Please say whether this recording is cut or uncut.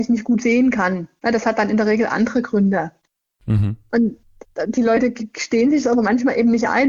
uncut